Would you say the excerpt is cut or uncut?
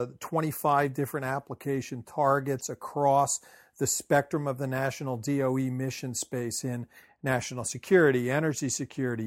uncut